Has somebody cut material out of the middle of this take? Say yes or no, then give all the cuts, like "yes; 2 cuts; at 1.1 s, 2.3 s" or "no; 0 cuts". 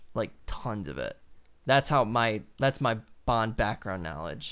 no; 0 cuts